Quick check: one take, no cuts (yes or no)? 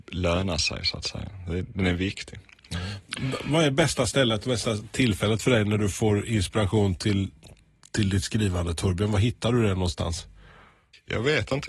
yes